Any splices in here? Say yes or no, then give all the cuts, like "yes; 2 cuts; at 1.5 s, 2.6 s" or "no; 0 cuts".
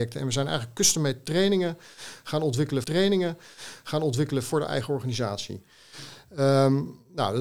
yes; 1 cut; at 2.8 s